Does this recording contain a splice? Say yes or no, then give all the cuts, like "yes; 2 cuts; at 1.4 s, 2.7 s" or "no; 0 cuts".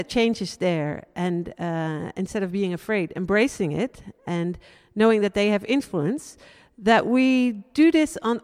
no; 0 cuts